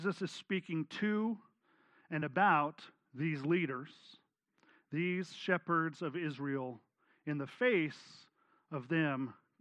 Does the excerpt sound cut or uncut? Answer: uncut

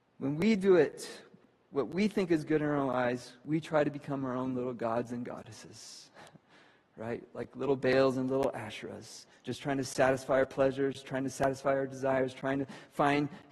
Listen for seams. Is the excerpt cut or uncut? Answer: uncut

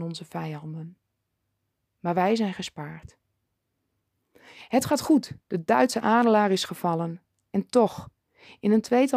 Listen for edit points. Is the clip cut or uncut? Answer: cut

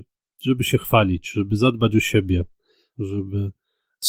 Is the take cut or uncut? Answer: uncut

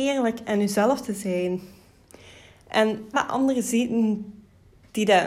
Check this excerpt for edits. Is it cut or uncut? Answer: cut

